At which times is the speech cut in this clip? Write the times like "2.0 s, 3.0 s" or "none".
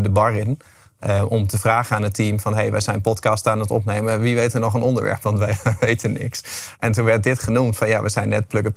none